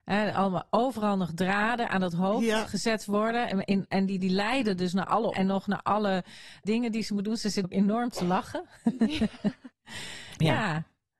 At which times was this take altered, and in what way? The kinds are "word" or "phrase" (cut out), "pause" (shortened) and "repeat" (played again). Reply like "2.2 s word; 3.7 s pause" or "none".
4.2 s word; 5.3 s word; 6.6 s word; 7.6 s word